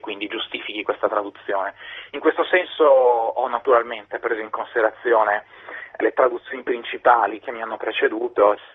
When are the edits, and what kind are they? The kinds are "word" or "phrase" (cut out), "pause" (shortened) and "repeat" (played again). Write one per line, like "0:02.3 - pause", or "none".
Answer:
none